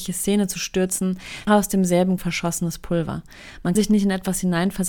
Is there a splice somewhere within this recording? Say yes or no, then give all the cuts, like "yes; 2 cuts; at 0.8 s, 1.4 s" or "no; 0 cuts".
yes; 3 cuts; at 1.5 s, 2.2 s, 3.7 s